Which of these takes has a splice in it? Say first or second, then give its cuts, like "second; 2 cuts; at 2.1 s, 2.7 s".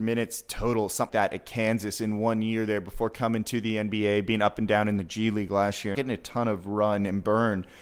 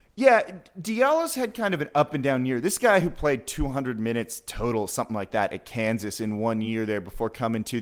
first; 2 cuts; at 1.1 s, 5.9 s